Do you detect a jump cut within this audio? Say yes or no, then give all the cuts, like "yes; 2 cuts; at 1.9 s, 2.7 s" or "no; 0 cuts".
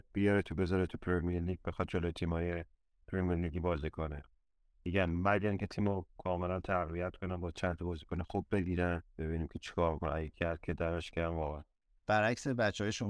no; 0 cuts